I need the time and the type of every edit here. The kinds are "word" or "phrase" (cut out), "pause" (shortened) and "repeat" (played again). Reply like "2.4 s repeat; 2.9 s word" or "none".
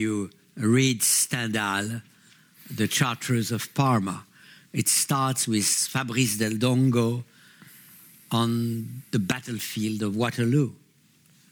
none

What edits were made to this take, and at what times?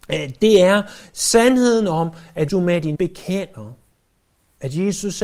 2.5 s word; 2.9 s word

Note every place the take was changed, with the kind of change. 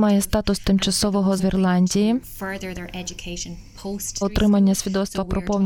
1.4 s word; 4.2 s word

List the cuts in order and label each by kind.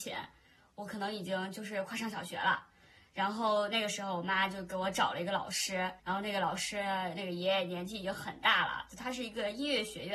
6.0 s pause

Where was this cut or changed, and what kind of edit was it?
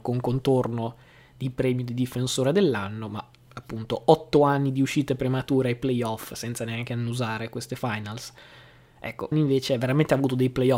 9.3 s word

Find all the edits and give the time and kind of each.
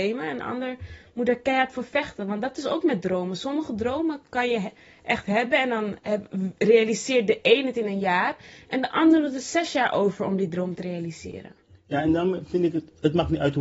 none

